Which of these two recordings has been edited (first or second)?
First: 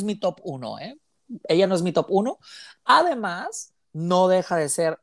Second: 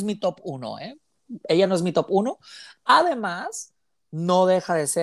first